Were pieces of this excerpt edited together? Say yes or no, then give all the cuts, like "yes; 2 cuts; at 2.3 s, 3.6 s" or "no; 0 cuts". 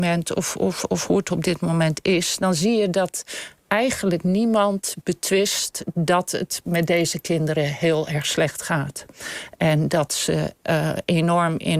no; 0 cuts